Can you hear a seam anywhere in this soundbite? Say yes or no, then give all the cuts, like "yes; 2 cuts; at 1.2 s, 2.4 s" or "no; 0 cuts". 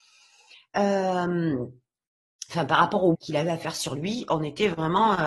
yes; 1 cut; at 3.1 s